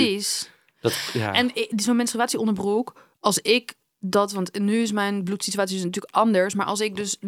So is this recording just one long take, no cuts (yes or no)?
yes